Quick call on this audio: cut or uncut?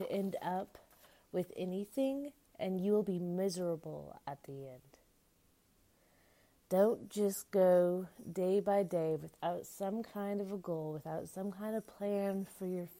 uncut